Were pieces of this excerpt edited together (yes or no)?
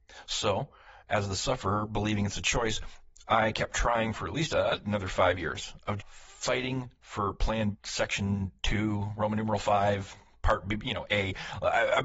yes